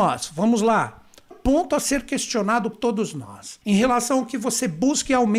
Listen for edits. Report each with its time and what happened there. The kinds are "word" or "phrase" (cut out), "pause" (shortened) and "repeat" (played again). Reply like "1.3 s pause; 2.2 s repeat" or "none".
1.3 s phrase; 2.7 s word; 3.6 s pause